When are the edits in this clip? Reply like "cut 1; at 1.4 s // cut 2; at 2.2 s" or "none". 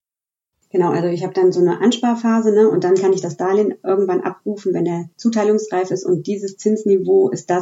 cut 1; at 5.1 s